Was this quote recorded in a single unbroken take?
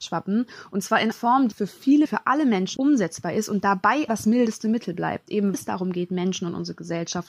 no; 6 cuts; at 1.1 s, 1.5 s, 2.1 s, 2.8 s, 4.1 s, 5.5 s

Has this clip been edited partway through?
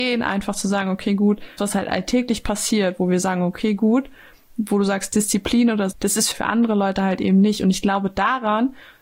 yes; 3 cuts; at 1.6 s, 5.9 s, 6.3 s

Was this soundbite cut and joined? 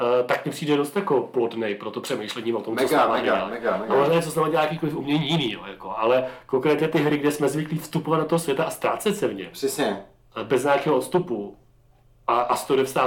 no; 0 cuts

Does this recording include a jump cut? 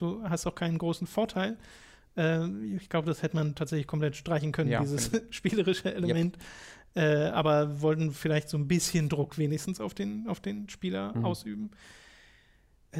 no; 0 cuts

